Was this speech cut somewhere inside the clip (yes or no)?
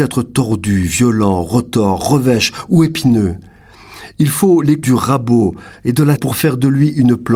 yes